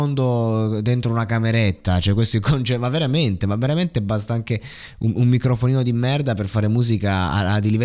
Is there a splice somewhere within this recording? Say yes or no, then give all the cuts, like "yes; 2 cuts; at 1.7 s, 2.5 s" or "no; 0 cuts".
no; 0 cuts